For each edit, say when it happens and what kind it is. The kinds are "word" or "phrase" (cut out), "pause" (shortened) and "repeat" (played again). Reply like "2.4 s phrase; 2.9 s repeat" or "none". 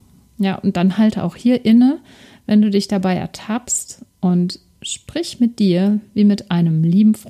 4.1 s pause